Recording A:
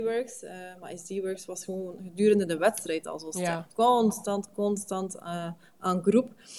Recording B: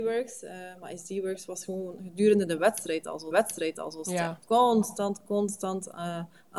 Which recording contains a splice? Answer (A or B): B